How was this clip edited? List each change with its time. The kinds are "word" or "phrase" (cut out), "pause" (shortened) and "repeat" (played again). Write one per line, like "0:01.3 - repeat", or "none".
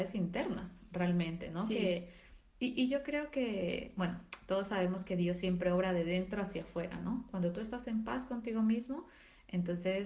none